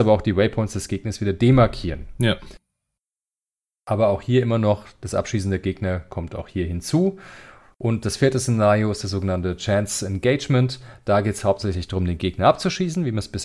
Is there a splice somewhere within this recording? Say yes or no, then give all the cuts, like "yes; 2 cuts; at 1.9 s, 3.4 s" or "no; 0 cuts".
no; 0 cuts